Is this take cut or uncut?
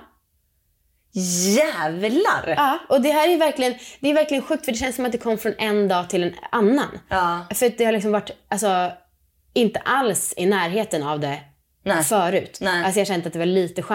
uncut